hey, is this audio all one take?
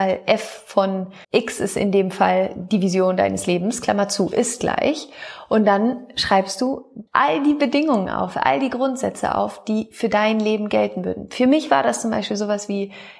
no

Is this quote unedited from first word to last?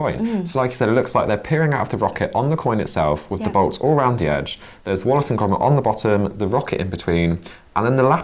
yes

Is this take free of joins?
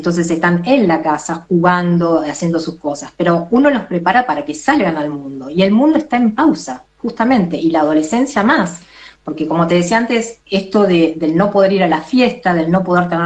yes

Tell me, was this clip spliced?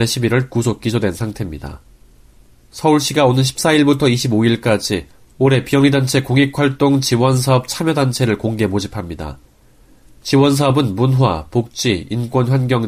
no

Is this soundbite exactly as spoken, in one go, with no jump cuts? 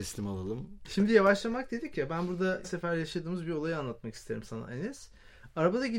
no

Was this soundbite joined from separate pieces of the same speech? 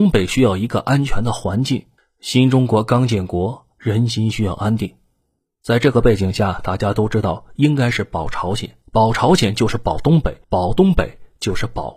yes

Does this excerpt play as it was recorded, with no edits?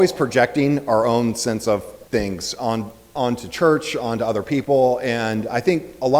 no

